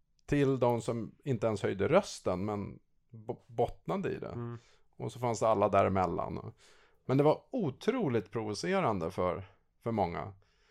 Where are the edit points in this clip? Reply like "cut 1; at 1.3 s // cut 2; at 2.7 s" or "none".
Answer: none